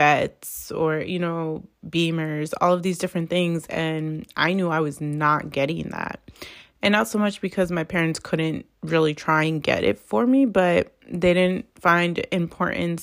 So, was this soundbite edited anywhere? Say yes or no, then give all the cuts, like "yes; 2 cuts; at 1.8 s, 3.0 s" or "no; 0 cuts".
yes; 1 cut; at 8.7 s